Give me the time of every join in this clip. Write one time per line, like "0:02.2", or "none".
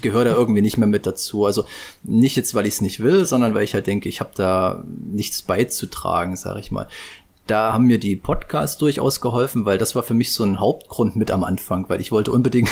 none